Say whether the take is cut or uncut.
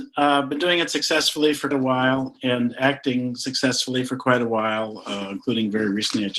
cut